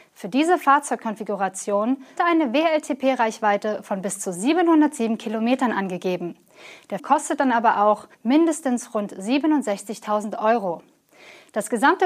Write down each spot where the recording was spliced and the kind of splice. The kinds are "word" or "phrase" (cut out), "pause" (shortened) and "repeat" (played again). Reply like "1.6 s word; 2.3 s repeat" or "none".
2.2 s word; 7.0 s phrase; 8.1 s pause